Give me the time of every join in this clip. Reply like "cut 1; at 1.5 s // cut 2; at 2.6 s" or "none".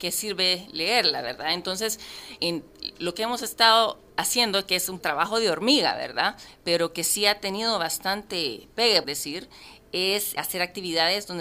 cut 1; at 2.4 s // cut 2; at 4.1 s // cut 3; at 5.0 s // cut 4; at 9.0 s // cut 5; at 10.4 s

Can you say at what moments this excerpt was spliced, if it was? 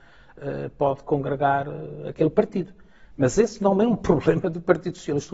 none

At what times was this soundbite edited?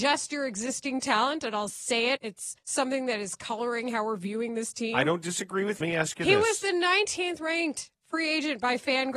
cut 1; at 2.2 s // cut 2; at 2.6 s // cut 3; at 5.8 s

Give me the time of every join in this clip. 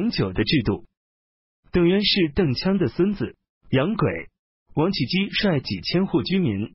cut 1; at 3.5 s

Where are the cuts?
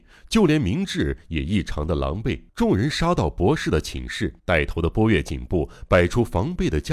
cut 1; at 2.5 s // cut 2; at 4.4 s

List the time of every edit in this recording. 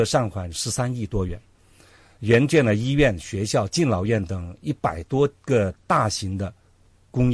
none

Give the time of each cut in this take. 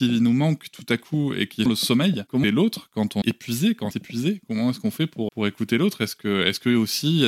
cut 1; at 1.7 s // cut 2; at 2.4 s // cut 3; at 3.2 s // cut 4; at 3.9 s // cut 5; at 5.3 s

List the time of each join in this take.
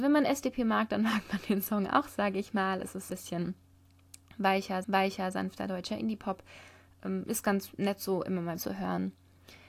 cut 1; at 3.1 s // cut 2; at 4.8 s // cut 3; at 8.6 s

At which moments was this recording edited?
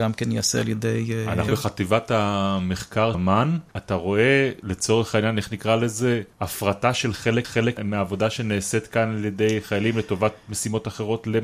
cut 1; at 1.5 s // cut 2; at 3.1 s // cut 3; at 3.7 s // cut 4; at 6.3 s // cut 5; at 7.4 s

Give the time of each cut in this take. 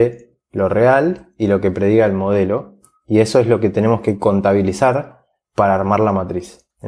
none

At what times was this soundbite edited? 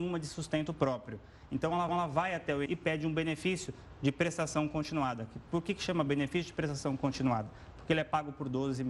cut 1; at 1.9 s // cut 2; at 2.7 s

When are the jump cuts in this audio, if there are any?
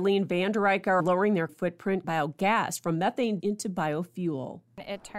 cut 1; at 1.0 s // cut 2; at 1.5 s // cut 3; at 2.0 s // cut 4; at 3.4 s

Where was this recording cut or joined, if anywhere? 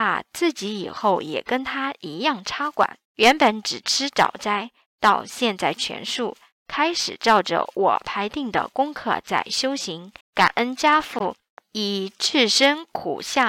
cut 1; at 3.0 s // cut 2; at 10.2 s // cut 3; at 11.6 s

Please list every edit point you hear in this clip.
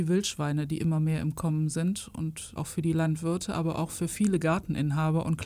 cut 1; at 2.6 s

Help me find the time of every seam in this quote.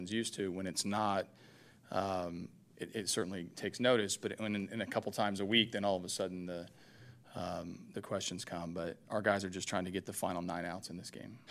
none

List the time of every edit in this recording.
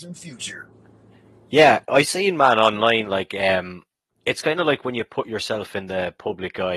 none

